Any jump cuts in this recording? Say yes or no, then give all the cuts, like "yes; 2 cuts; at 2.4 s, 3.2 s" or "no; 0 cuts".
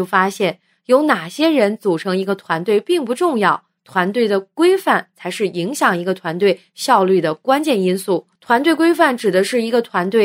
yes; 1 cut; at 8.3 s